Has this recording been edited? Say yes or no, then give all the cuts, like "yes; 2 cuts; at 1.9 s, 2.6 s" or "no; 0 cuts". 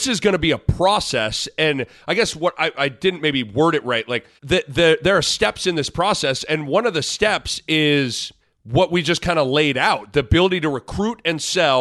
yes; 2 cuts; at 4.4 s, 8.4 s